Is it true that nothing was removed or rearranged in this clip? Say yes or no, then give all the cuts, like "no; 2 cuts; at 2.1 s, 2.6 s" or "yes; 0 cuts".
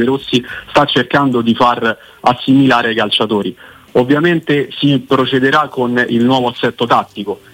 yes; 0 cuts